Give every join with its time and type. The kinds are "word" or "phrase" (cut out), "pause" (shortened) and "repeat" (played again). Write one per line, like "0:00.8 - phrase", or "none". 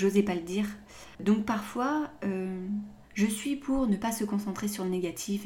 0:01.1 - pause
0:03.0 - pause